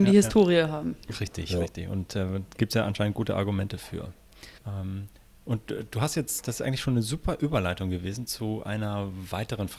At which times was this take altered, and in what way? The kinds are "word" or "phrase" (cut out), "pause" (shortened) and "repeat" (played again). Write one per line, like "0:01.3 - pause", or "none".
0:04.6 - pause